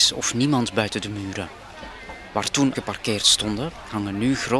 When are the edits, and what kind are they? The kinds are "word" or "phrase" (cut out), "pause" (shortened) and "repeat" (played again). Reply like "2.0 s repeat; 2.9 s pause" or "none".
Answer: 2.7 s word